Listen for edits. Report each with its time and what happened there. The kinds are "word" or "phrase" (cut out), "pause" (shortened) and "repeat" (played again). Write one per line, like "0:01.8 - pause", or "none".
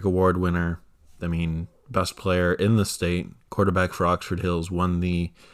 none

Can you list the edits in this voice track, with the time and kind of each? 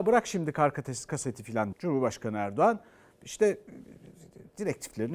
0:01.1 - word
0:01.7 - word

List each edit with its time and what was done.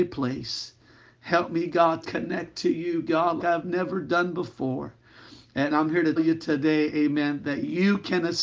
0:02.0 - word
0:03.4 - word
0:06.2 - word

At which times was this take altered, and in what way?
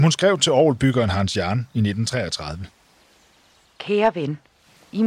none

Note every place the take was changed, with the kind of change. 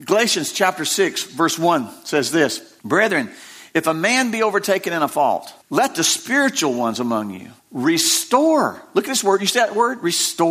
0:02.8 - pause
0:05.6 - pause
0:07.6 - pause

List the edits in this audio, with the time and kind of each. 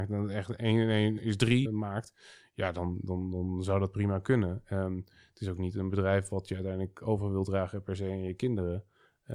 0:01.2 - word
0:01.7 - word

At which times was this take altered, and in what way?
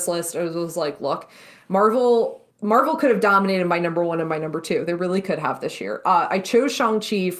0:02.5 - pause

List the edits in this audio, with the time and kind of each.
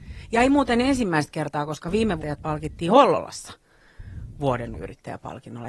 0:02.2 - word
0:04.7 - word

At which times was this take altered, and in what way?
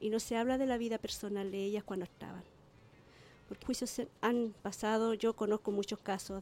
0:03.6 - word
0:04.6 - pause

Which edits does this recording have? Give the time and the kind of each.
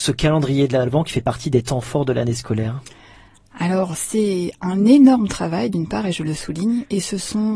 none

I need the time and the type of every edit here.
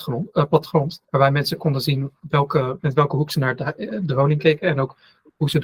0:01.0 - pause

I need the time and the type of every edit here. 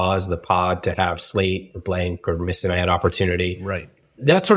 none

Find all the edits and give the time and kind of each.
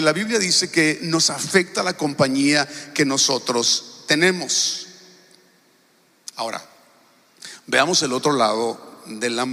none

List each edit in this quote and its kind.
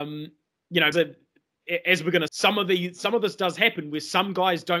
0:00.9 - word
0:02.3 - word

